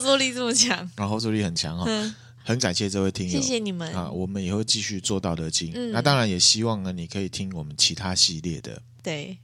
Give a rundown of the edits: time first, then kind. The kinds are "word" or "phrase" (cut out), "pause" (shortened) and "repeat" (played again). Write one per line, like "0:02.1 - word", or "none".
none